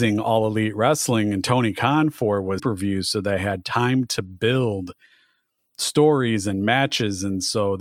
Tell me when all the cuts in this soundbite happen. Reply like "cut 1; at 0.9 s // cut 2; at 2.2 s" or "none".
cut 1; at 2.6 s